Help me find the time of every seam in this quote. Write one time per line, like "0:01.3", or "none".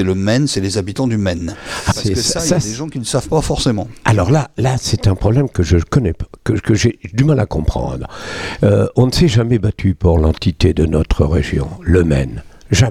0:01.9